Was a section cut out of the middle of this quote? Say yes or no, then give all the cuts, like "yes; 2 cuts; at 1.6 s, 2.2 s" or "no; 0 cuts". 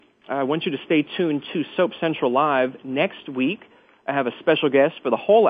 no; 0 cuts